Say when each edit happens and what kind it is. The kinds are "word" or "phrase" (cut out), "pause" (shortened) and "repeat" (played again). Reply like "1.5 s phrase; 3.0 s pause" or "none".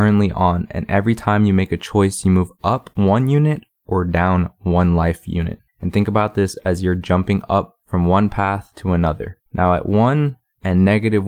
5.7 s pause; 9.5 s pause